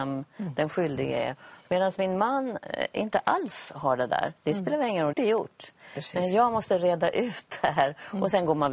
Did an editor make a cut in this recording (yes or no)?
yes